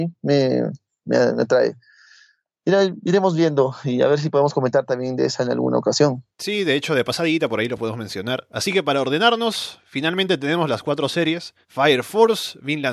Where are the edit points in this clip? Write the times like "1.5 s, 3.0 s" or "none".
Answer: 6.3 s, 11.6 s